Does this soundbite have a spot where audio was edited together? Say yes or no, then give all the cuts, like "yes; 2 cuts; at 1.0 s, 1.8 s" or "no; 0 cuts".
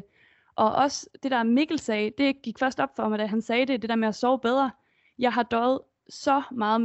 no; 0 cuts